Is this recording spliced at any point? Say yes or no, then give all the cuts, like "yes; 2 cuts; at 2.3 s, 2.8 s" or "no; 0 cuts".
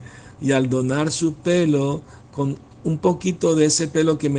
no; 0 cuts